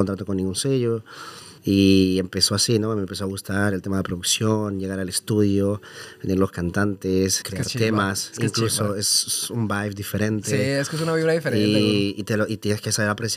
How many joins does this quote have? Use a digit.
2